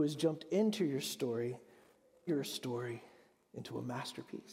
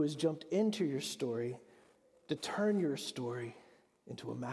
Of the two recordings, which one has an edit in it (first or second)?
first